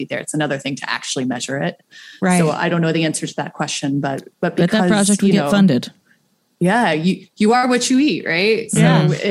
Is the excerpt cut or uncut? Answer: uncut